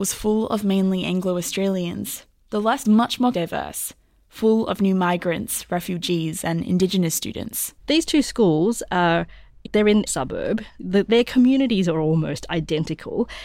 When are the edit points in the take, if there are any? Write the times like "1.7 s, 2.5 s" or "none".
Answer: 2.8 s, 3.3 s, 7.8 s, 9.6 s, 10.1 s